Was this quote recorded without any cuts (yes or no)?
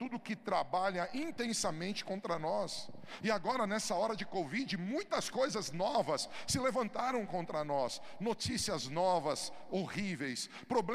yes